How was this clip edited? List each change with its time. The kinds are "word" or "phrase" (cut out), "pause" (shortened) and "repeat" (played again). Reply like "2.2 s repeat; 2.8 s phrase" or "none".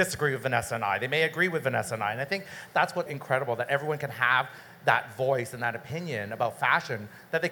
3.1 s word